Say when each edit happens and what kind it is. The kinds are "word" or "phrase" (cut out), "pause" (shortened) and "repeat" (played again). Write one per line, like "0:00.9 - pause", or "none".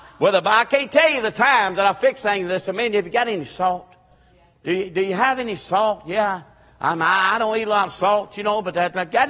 none